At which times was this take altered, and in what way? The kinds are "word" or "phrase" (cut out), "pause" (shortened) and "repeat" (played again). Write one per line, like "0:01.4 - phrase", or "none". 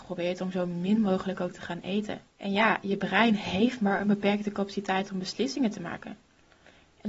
0:02.3 - pause